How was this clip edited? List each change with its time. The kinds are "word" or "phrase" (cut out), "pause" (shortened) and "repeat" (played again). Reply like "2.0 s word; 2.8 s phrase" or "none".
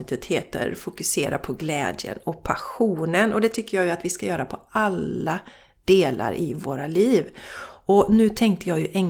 none

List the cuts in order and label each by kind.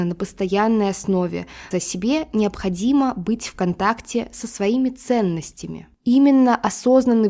1.7 s word

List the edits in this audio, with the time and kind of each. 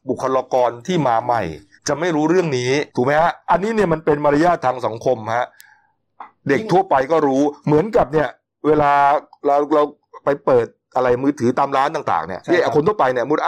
1.7 s pause; 2.9 s pause; 3.4 s pause

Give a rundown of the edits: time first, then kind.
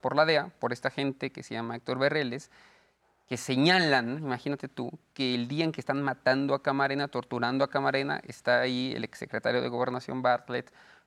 none

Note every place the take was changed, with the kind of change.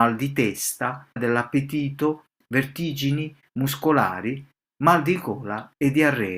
1.2 s word; 3.5 s word

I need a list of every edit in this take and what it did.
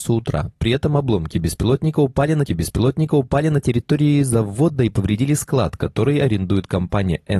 2.5 s repeat

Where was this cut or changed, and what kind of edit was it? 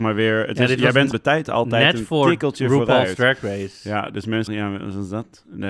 1.1 s word; 4.5 s word

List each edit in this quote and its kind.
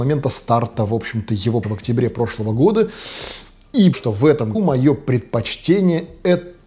1.6 s word; 3.9 s word; 4.5 s word

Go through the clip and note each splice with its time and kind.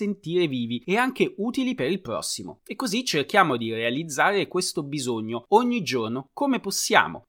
none

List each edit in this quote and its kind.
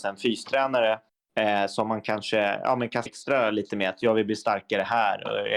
1.1 s pause; 3.1 s word

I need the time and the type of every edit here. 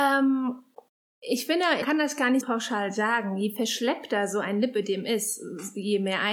1.8 s word; 2.4 s word

